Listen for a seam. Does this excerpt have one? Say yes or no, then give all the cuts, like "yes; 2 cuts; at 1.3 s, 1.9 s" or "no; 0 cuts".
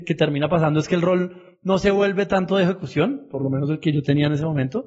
no; 0 cuts